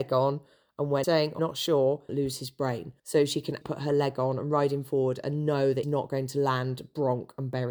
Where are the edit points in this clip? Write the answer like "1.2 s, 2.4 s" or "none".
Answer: 1.0 s, 1.4 s, 2.1 s, 3.0 s, 3.6 s, 5.8 s